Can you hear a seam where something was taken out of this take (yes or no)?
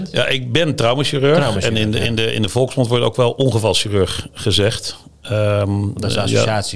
no